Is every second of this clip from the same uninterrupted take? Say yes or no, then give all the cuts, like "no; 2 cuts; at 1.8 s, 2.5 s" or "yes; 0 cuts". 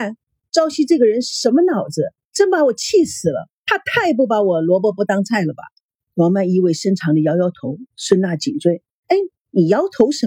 no; 4 cuts; at 2.2 s, 3.6 s, 5.9 s, 7.9 s